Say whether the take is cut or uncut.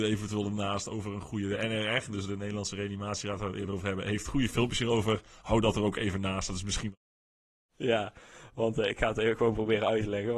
uncut